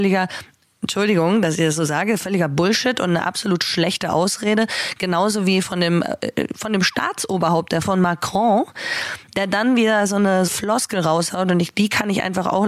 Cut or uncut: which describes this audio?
cut